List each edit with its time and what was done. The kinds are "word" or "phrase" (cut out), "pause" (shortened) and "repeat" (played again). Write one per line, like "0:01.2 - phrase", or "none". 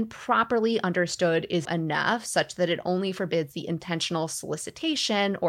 0:01.6 - word